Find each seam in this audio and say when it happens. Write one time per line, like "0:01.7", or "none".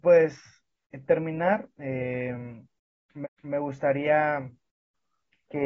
0:01.1
0:01.7
0:03.2